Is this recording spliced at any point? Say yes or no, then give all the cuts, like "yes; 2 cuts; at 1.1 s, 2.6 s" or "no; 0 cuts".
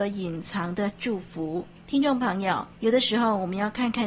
yes; 2 cuts; at 1.8 s, 2.7 s